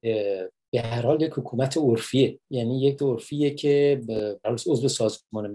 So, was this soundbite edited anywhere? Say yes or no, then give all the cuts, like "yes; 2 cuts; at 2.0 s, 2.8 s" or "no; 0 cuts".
yes; 3 cuts; at 2.4 s, 3.0 s, 4.4 s